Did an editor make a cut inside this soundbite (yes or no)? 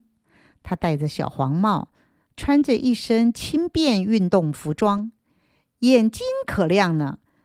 no